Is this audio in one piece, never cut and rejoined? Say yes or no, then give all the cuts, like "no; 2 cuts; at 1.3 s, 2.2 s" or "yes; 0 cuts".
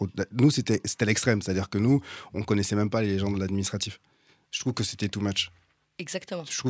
yes; 0 cuts